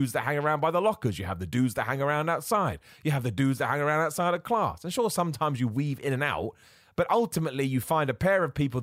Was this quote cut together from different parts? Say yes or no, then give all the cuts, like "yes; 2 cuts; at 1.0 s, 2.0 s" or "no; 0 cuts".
no; 0 cuts